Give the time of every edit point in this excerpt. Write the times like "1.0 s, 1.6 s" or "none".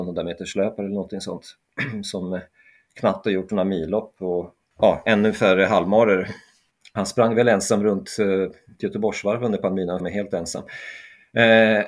8.8 s, 10.0 s